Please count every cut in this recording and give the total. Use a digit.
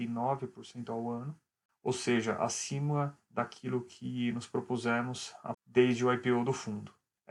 1